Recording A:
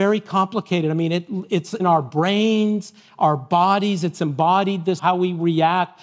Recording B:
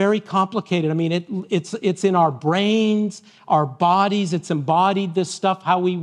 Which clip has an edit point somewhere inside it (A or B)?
A